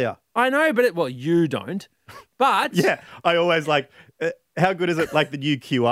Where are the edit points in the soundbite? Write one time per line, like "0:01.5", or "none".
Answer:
none